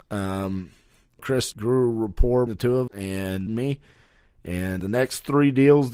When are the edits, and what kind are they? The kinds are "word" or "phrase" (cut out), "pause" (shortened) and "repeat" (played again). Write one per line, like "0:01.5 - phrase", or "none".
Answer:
0:01.2 - word
0:01.5 - phrase
0:02.5 - word
0:02.9 - word
0:03.5 - phrase
0:04.8 - word